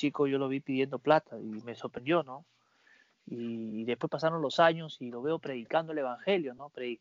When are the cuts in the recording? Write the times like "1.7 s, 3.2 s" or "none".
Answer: none